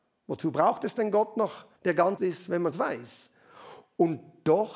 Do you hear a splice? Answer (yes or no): yes